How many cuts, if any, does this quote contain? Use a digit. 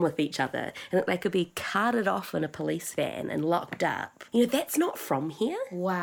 1